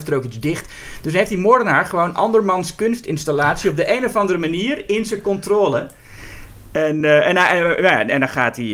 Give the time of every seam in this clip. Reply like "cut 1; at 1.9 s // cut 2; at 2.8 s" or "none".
none

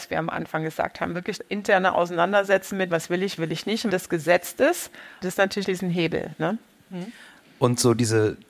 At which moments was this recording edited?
cut 1; at 1.4 s // cut 2; at 2.9 s // cut 3; at 3.4 s // cut 4; at 3.9 s // cut 5; at 5.2 s // cut 6; at 5.6 s

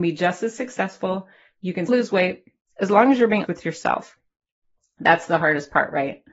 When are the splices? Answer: cut 1; at 1.9 s // cut 2; at 3.5 s

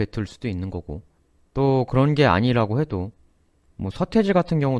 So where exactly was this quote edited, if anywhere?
cut 1; at 1.2 s

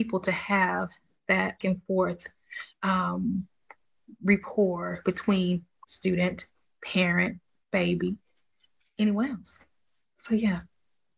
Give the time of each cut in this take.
cut 1; at 1.6 s // cut 2; at 5.8 s // cut 3; at 8.8 s

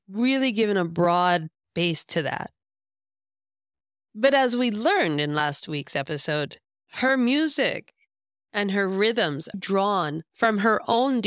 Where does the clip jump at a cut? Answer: cut 1; at 9.5 s

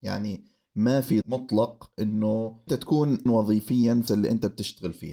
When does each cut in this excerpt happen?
cut 1; at 1.2 s // cut 2; at 2.7 s // cut 3; at 3.3 s // cut 4; at 4.1 s

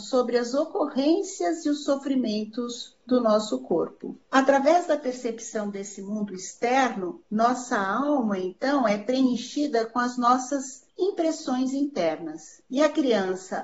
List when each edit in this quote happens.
cut 1; at 4.2 s // cut 2; at 10.9 s // cut 3; at 12.7 s

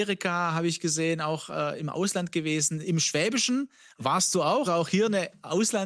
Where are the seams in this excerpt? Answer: cut 1; at 4.6 s

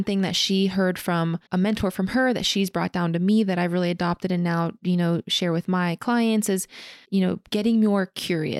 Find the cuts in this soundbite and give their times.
cut 1; at 1.5 s // cut 2; at 7.0 s

